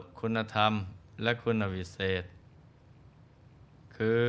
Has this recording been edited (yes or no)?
no